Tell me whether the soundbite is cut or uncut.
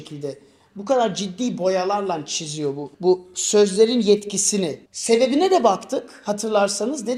cut